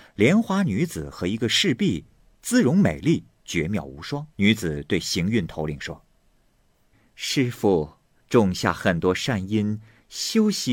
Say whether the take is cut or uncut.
cut